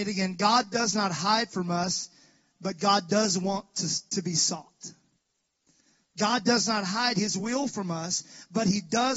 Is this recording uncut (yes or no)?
yes